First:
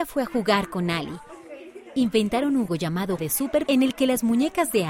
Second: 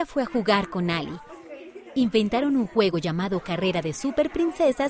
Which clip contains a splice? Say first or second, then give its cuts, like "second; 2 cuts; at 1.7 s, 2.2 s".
first; 3 cuts; at 2.7 s, 3.2 s, 3.7 s